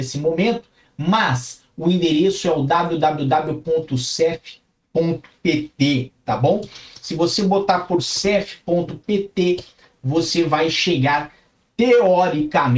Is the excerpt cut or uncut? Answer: uncut